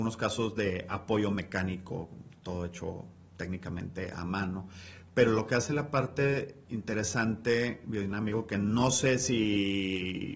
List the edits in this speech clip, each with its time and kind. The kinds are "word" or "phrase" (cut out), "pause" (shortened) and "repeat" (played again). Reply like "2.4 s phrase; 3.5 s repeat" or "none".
6.6 s pause